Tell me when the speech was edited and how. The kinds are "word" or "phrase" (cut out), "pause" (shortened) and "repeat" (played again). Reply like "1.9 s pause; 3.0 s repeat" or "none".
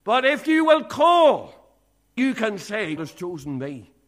2.2 s word; 3.0 s word